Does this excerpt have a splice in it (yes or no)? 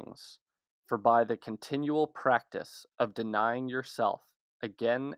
no